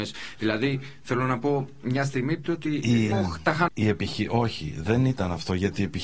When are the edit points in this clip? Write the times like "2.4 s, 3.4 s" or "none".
2.5 s, 3.1 s, 3.7 s